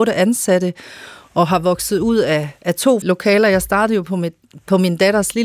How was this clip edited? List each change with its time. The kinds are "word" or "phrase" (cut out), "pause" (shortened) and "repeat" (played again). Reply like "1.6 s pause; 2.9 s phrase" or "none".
3.0 s word